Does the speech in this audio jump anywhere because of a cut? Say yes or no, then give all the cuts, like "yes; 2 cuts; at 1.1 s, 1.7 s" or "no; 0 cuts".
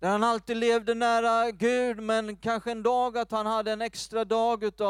no; 0 cuts